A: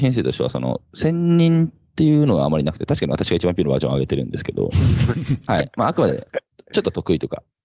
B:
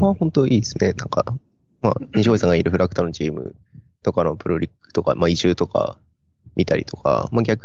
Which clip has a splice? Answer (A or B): A